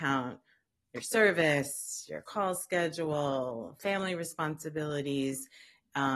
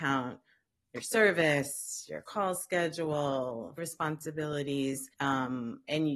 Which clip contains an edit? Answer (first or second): second